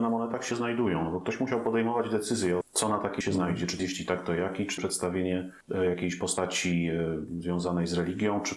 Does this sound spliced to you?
yes; 4 cuts; at 2.6 s, 3.2 s, 3.8 s, 4.8 s

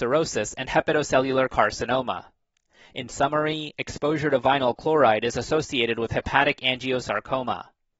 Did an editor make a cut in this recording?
no; 0 cuts

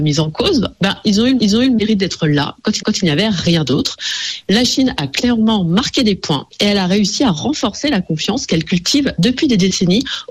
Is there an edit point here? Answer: yes; 2 cuts; at 1.4 s, 2.8 s

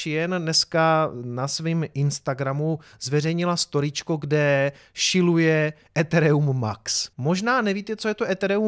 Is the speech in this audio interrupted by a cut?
yes; 1 cut; at 7.1 s

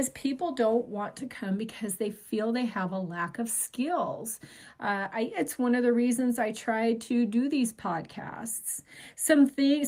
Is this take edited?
no; 0 cuts

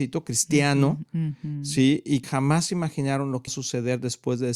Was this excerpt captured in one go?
no; 2 cuts; at 2.2 s, 3.5 s

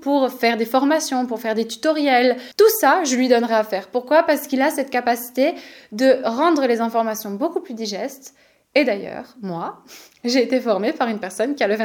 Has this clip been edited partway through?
no; 0 cuts

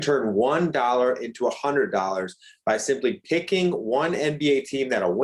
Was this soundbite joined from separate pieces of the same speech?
no; 0 cuts

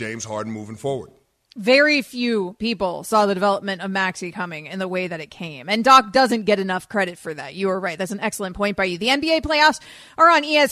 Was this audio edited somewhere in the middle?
no; 0 cuts

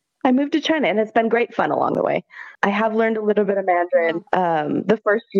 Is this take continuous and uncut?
no; 2 cuts; at 2.5 s, 4.3 s

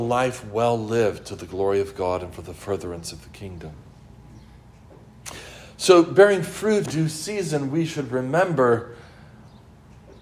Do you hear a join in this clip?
yes; 1 cut; at 6.9 s

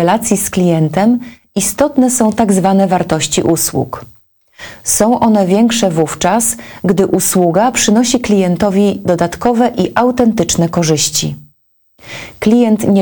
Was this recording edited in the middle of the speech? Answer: no; 0 cuts

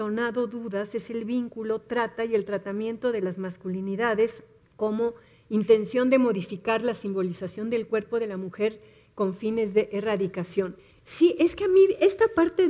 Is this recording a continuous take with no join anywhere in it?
yes; 0 cuts

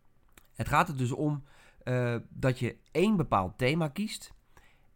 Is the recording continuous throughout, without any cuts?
yes; 0 cuts

